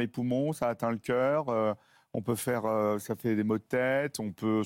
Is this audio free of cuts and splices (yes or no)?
yes